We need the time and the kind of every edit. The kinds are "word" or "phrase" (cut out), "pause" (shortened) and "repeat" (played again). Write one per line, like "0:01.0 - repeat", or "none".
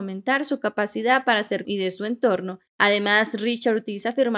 0:01.6 - phrase
0:02.7 - pause